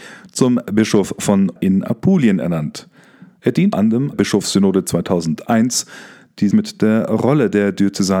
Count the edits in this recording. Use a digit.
4